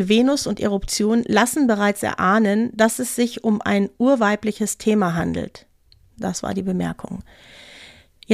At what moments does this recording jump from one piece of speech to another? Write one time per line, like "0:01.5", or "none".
none